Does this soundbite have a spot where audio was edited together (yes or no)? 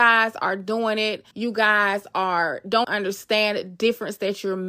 yes